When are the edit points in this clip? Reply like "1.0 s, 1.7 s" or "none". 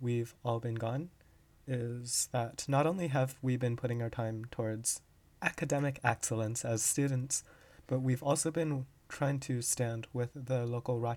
none